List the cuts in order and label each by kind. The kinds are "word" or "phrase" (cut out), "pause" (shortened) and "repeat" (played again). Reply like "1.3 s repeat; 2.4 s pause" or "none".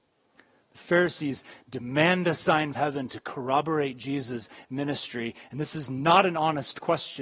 2.7 s word